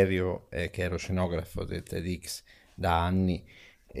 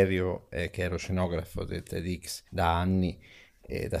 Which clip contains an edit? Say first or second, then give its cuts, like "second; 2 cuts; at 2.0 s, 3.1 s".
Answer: second; 1 cut; at 2.5 s